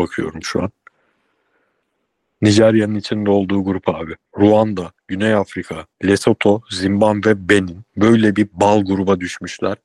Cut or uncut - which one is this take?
cut